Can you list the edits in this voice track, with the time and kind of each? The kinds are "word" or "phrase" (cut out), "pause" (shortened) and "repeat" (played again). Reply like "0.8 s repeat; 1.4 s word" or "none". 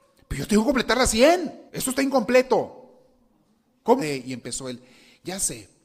1.7 s pause; 4.0 s word